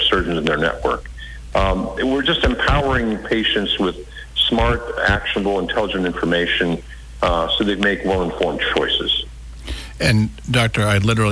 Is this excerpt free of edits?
yes; 0 cuts

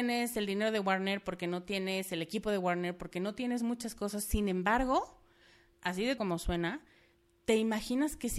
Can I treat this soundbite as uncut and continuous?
no; 1 cut; at 6.2 s

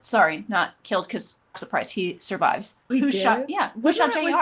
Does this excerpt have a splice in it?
yes; 2 cuts; at 1.5 s, 2.9 s

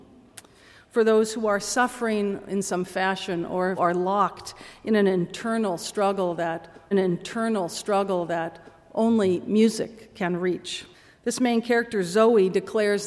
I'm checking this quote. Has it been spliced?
yes; 3 cuts; at 3.8 s, 6.9 s, 10.9 s

